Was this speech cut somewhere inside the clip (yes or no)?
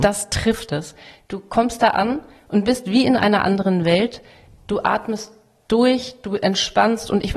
no